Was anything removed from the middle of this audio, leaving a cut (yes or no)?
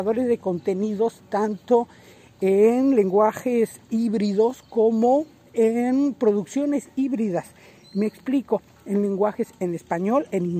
no